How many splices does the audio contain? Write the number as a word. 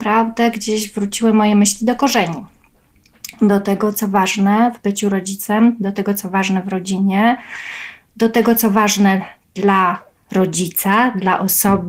one